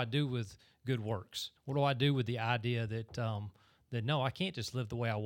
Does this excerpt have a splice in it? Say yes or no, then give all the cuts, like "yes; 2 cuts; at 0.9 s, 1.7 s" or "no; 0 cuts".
yes; 1 cut; at 1.6 s